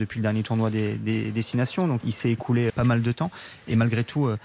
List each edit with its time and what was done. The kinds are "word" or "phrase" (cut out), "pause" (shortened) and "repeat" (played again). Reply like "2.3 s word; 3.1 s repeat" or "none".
2.0 s word; 2.7 s word